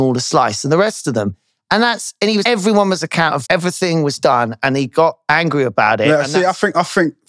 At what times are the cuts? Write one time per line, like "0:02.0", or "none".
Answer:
0:02.4
0:03.4